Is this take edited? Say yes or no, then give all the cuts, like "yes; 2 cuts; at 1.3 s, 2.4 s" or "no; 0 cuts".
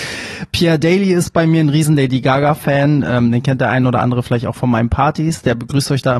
no; 0 cuts